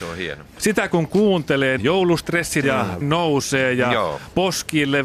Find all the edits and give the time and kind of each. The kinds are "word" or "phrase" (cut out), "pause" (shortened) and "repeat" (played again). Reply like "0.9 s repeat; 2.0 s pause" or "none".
1.8 s word; 2.6 s word; 3.0 s word